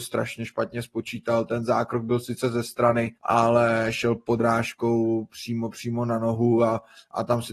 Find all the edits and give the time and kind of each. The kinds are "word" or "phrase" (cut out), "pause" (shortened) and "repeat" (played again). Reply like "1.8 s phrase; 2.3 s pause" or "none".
3.2 s pause